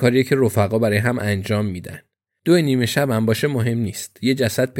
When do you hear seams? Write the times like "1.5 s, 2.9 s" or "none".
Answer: none